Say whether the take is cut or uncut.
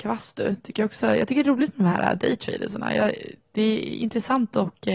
uncut